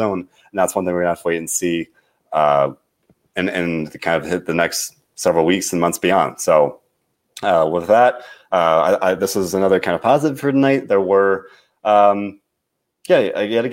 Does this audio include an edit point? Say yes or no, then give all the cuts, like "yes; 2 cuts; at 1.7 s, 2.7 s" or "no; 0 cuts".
no; 0 cuts